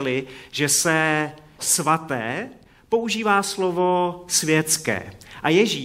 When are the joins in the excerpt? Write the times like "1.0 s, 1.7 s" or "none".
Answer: 1.6 s